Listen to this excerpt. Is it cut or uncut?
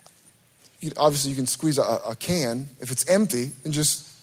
uncut